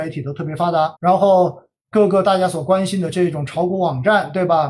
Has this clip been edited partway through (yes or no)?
yes